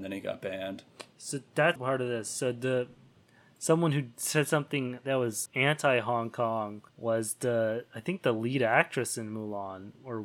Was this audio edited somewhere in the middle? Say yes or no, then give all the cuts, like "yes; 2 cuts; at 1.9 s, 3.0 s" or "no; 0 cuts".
yes; 3 cuts; at 1.8 s, 5.5 s, 6.9 s